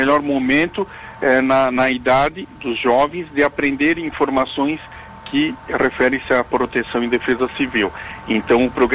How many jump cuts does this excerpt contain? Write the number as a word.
zero